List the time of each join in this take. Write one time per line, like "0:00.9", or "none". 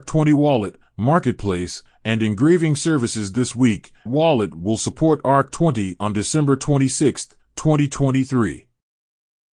0:04.1